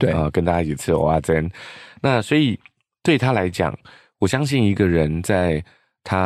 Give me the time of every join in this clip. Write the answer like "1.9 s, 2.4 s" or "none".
none